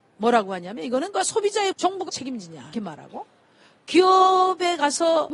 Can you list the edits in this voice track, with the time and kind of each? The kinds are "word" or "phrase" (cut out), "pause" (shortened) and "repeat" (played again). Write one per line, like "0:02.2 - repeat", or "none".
0:01.1 - word
0:01.7 - word
0:02.1 - word
0:02.7 - word